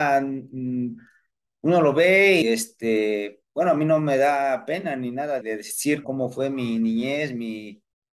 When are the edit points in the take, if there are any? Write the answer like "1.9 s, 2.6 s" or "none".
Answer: 2.4 s, 3.5 s, 5.4 s, 6.0 s